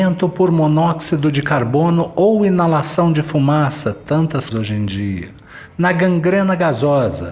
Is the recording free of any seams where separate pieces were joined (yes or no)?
no